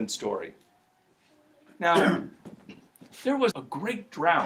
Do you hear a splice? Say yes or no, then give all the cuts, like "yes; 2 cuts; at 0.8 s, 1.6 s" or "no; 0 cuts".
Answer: yes; 1 cut; at 3.5 s